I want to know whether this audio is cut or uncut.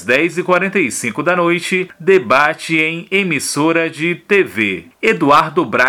uncut